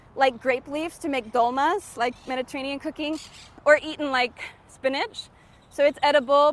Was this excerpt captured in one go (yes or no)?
yes